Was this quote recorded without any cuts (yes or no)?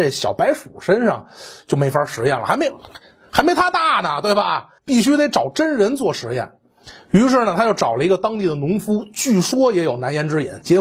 no